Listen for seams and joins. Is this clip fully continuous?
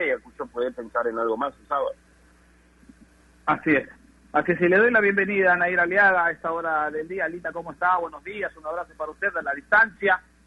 yes; 0 cuts

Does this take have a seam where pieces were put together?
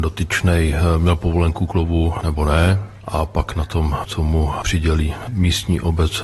no; 0 cuts

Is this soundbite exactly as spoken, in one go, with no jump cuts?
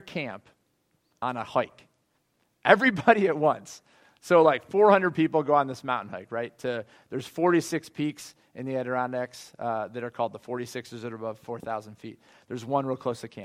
yes; 0 cuts

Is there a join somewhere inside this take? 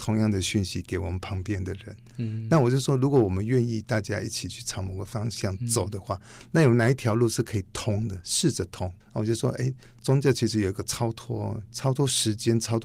yes; 2 cuts; at 9.0 s, 11.7 s

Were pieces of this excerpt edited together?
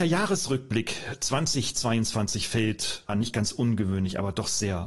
yes; 1 cut; at 3.1 s

